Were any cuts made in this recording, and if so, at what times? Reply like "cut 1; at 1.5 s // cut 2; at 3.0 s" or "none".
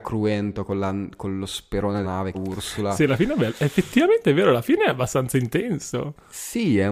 cut 1; at 2.0 s // cut 2; at 2.3 s